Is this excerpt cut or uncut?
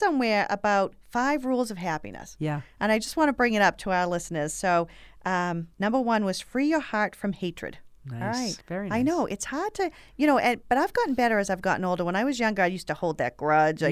cut